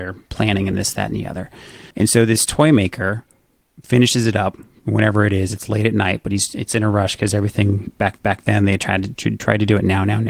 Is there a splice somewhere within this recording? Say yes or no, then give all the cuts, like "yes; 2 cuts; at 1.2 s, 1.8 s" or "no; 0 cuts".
yes; 2 cuts; at 1.9 s, 8.2 s